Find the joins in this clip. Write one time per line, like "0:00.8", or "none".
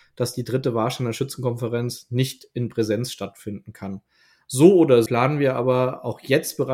0:05.1